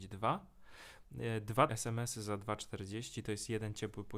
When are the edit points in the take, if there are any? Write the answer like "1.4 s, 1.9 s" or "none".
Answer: 1.7 s